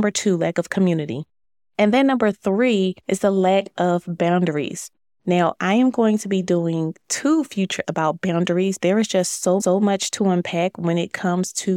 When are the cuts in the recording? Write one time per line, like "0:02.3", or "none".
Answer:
0:01.4
0:03.0
0:07.8
0:08.8
0:09.6